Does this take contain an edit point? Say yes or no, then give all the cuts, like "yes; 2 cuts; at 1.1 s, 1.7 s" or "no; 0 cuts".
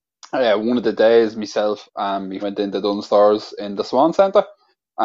yes; 1 cut; at 2.4 s